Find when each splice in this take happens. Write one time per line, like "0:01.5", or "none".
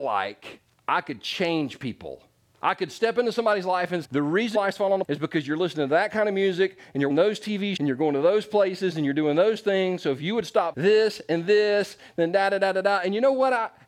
0:04.0
0:04.5
0:05.0
0:07.1
0:07.8
0:10.7